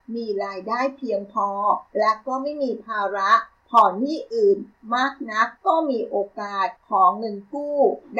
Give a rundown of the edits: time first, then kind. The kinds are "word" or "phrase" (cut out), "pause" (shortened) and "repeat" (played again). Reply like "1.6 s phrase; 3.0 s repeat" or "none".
1.9 s pause; 5.6 s pause; 6.8 s pause